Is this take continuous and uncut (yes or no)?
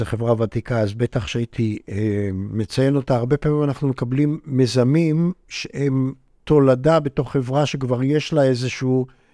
yes